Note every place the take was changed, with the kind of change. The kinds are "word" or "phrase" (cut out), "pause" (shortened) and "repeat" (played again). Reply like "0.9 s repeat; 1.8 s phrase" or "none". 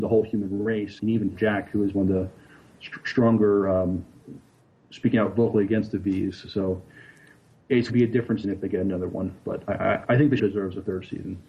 1.0 s word; 1.3 s word; 1.9 s word; 7.9 s word; 8.4 s word; 9.6 s word; 10.0 s word; 10.4 s word